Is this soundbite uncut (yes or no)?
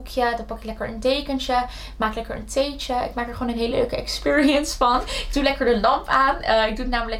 yes